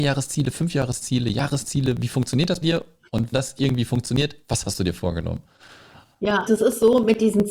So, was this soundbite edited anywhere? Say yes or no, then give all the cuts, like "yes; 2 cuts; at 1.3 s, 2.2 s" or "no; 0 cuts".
yes; 3 cuts; at 2.6 s, 3.3 s, 6.5 s